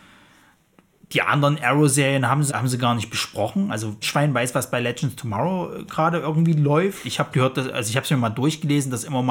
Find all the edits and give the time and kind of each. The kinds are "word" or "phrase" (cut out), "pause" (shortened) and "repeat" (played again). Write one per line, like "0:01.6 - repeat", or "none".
0:02.5 - word
0:04.0 - word
0:07.3 - word